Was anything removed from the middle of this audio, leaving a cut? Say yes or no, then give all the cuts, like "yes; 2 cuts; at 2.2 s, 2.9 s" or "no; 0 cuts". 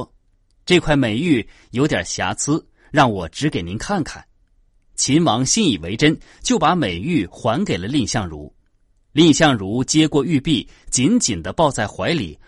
no; 0 cuts